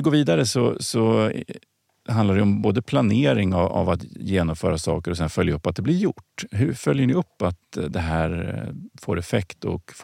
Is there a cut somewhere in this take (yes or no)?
no